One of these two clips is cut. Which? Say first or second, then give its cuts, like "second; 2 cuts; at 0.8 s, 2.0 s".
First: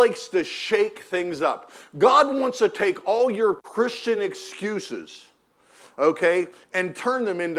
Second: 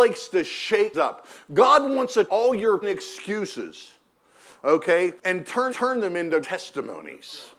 second; 6 cuts; at 0.9 s, 2.3 s, 2.8 s, 5.2 s, 5.7 s, 6.4 s